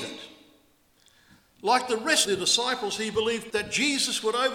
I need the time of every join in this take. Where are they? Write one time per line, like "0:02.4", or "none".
0:02.3
0:03.5